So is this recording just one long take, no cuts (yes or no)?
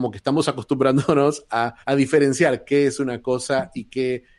no